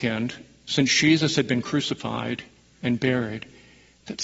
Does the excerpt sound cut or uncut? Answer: uncut